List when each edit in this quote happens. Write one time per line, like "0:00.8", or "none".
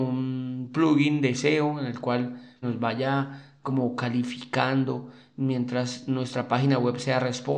0:02.6